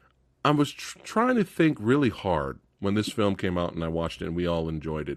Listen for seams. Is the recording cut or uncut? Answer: uncut